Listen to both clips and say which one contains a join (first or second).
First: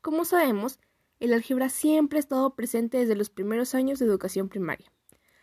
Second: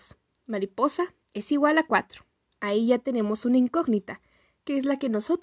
second